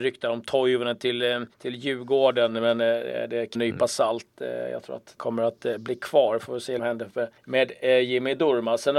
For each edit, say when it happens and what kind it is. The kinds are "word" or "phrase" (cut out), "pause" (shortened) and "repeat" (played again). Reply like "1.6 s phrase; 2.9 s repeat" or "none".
1.5 s pause; 3.5 s phrase; 5.2 s word; 6.8 s phrase; 7.4 s pause